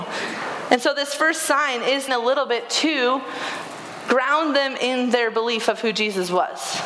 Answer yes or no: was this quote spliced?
yes